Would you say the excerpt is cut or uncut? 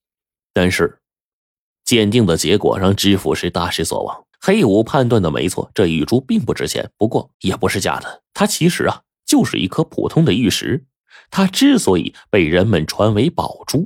cut